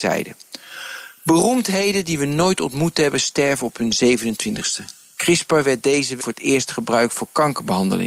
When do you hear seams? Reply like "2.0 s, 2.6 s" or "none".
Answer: 6.2 s